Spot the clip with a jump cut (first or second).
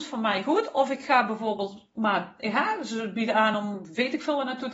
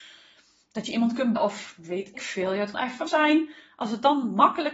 second